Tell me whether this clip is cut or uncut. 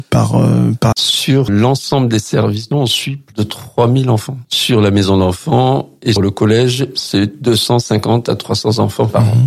cut